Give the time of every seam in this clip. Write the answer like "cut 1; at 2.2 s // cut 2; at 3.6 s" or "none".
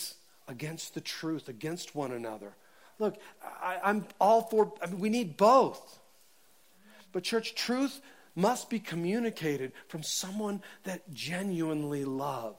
none

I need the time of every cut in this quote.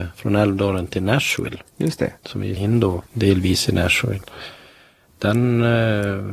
cut 1; at 2.6 s // cut 2; at 3.1 s

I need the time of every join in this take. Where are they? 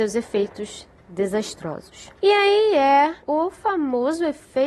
cut 1; at 2.2 s // cut 2; at 3.2 s

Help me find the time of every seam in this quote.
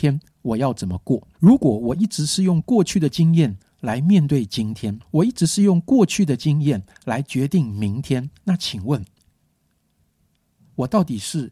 cut 1; at 1.3 s // cut 2; at 5.0 s // cut 3; at 8.4 s

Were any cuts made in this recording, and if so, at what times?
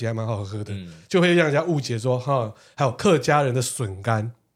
none

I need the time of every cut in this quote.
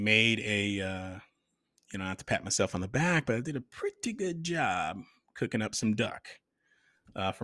none

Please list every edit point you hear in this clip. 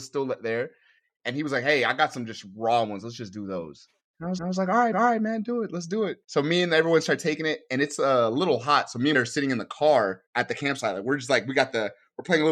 cut 1; at 4.0 s // cut 2; at 4.4 s // cut 3; at 4.9 s // cut 4; at 6.2 s // cut 5; at 9.1 s // cut 6; at 10.3 s

